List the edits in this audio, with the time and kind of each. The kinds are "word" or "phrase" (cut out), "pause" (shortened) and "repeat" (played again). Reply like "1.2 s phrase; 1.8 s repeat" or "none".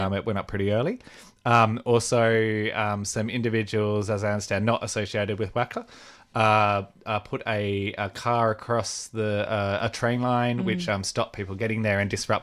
none

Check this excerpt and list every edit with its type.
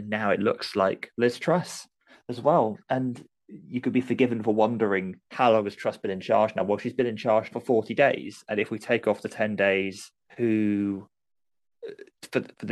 5.3 s pause; 7.5 s word; 10.3 s pause

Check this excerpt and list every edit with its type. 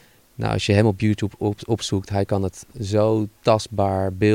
3.4 s pause

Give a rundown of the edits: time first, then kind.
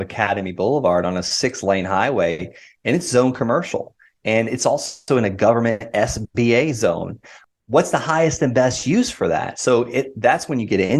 none

